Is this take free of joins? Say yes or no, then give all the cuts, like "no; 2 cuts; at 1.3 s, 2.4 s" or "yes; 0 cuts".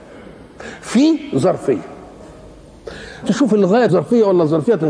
no; 2 cuts; at 3.2 s, 3.9 s